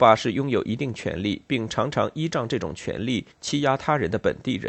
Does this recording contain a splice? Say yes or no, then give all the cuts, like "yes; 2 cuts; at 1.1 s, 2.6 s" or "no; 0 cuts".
yes; 1 cut; at 3.3 s